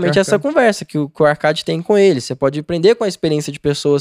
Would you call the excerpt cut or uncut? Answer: uncut